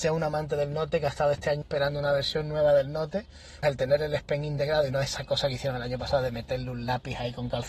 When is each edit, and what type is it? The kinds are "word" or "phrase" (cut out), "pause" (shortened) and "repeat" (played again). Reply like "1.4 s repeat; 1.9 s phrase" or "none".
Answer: 1.6 s phrase; 3.6 s word